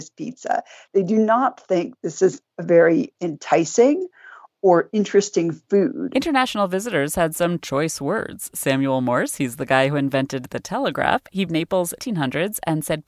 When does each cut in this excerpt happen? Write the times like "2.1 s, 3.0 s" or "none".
3.1 s, 11.5 s, 12.0 s